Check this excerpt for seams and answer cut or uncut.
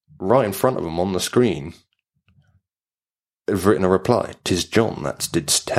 uncut